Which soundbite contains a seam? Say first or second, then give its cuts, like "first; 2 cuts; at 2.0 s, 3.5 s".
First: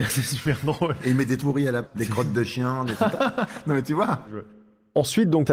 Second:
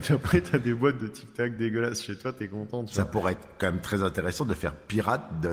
first; 4 cuts; at 1.4 s, 1.8 s, 3.1 s, 4.2 s